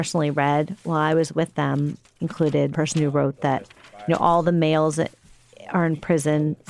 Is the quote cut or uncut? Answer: cut